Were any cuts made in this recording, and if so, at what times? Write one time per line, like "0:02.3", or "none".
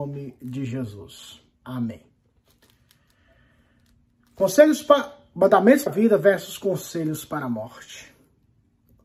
0:01.5
0:05.9